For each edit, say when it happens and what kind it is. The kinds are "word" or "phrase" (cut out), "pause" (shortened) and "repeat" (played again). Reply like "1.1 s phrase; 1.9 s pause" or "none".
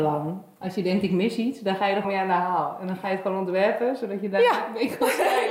2.0 s word

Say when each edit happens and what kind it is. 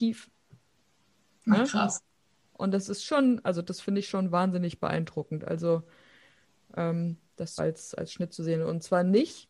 7.6 s word

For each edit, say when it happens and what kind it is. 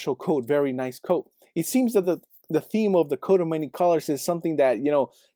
none

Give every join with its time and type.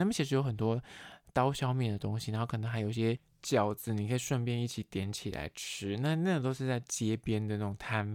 none

